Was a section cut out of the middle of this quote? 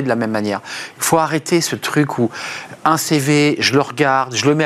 no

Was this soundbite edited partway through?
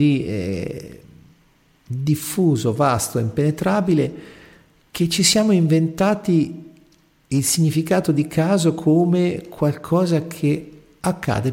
no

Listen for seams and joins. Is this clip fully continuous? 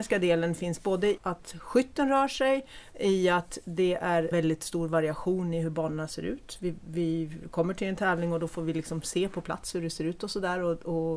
no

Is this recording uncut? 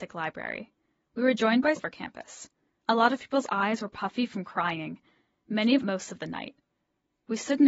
no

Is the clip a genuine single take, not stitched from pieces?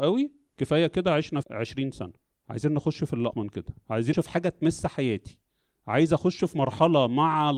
no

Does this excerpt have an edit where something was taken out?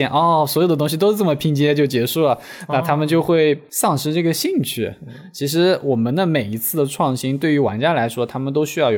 no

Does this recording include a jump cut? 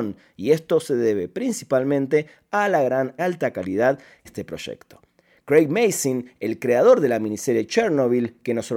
yes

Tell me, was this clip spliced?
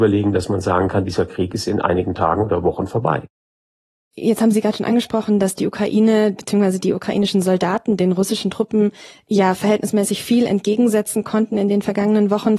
no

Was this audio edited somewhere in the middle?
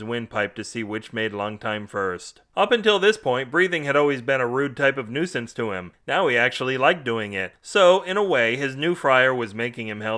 no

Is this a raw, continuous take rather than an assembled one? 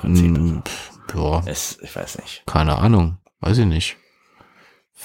yes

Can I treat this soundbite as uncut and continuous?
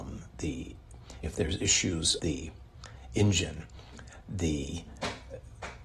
no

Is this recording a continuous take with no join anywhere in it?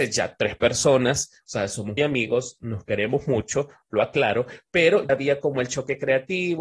no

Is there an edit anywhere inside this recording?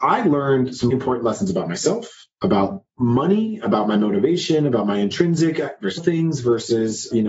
yes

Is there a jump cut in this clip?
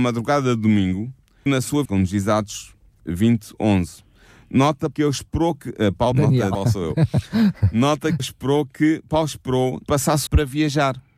yes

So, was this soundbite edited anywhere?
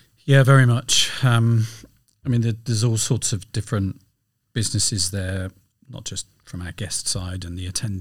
yes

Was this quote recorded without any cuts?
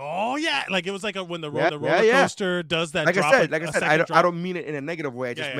no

